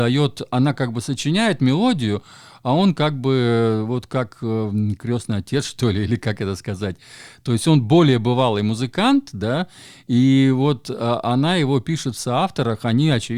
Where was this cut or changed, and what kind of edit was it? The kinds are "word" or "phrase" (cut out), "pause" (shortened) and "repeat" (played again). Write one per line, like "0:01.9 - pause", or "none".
none